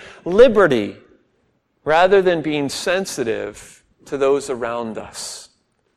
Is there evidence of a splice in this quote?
yes; 2 cuts; at 1.5 s, 3.9 s

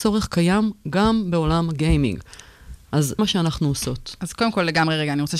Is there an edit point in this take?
yes; 1 cut; at 3.2 s

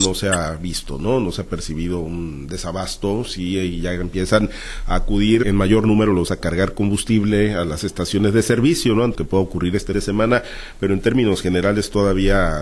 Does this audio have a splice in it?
yes; 4 cuts; at 5.4 s, 6.3 s, 9.1 s, 9.9 s

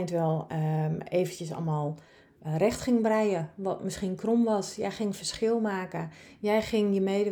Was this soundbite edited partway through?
no; 0 cuts

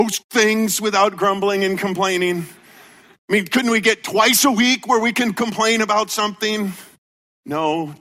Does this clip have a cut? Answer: no; 0 cuts

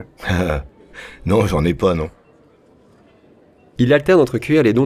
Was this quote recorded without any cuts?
yes; 0 cuts

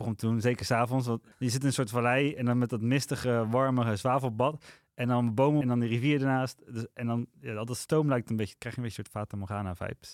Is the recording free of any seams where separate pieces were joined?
no; 2 cuts; at 1.3 s, 5.6 s

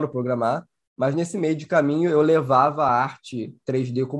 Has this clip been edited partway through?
no; 0 cuts

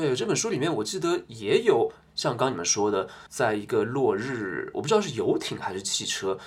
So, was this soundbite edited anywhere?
yes; 1 cut; at 3.3 s

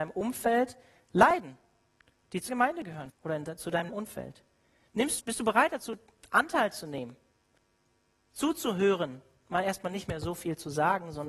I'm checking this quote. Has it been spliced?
yes; 4 cuts; at 2.5 s, 3.1 s, 3.9 s, 5.2 s

